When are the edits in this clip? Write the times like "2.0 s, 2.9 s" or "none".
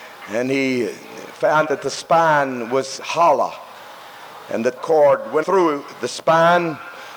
1.6 s, 4.8 s, 5.4 s